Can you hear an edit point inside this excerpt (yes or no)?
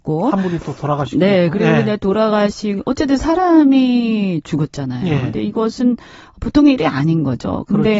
no